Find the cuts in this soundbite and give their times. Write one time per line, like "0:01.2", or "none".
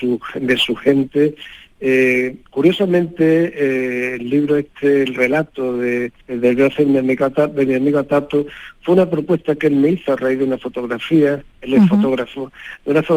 0:02.5
0:06.2